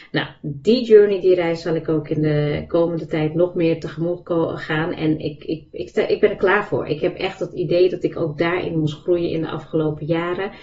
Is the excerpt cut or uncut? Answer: uncut